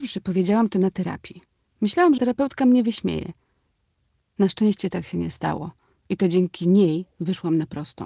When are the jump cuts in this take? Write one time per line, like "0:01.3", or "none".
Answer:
0:02.2

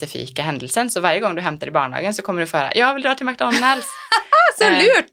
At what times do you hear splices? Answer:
none

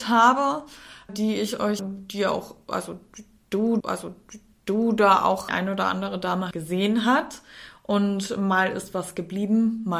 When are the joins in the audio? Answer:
0:01.1
0:01.8
0:03.8
0:05.5
0:06.5

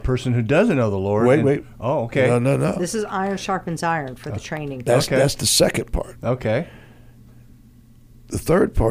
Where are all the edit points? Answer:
none

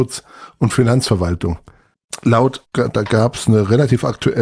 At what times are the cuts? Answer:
0:02.6

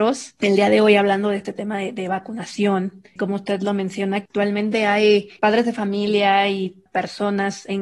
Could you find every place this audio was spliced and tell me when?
0:05.4

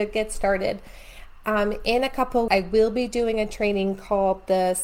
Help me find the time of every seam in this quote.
0:02.5

